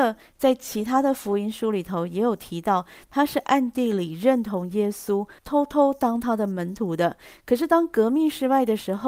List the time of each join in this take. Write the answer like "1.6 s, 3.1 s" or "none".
5.4 s